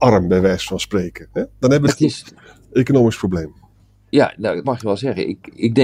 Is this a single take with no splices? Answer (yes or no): no